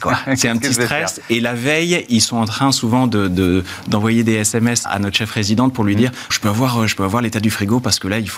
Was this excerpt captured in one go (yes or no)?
no